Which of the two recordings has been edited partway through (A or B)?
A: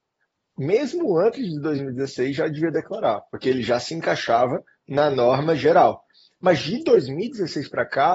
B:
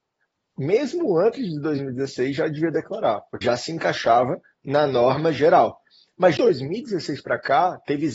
B